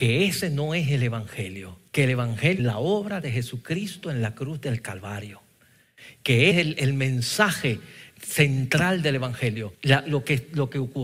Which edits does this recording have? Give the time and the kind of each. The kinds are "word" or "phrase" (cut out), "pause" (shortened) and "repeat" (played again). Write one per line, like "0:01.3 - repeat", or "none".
0:01.9 - pause
0:02.6 - phrase
0:06.5 - word
0:09.7 - pause